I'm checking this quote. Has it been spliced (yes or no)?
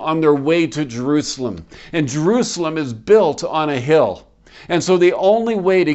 no